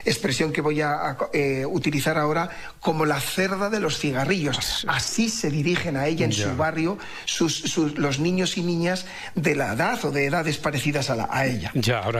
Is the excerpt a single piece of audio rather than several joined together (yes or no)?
yes